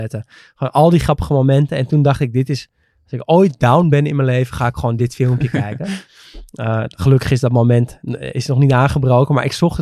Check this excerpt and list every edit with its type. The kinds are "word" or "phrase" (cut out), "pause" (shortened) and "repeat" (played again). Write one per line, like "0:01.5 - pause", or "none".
none